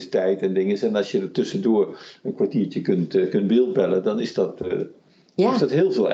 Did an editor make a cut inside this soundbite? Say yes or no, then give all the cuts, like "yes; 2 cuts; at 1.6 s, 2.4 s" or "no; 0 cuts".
no; 0 cuts